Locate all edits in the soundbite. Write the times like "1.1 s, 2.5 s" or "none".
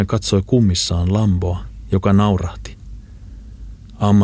none